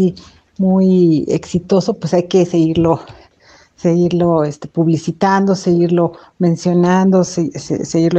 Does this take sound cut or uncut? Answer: uncut